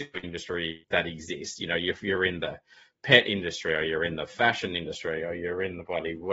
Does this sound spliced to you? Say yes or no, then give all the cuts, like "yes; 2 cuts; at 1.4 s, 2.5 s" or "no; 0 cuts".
no; 0 cuts